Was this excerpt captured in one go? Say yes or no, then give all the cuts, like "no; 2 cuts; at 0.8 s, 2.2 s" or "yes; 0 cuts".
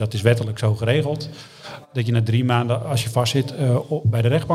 yes; 0 cuts